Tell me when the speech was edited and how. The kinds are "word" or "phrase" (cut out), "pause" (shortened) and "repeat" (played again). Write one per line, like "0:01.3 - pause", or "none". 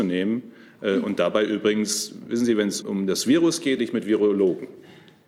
0:02.8 - word
0:03.8 - word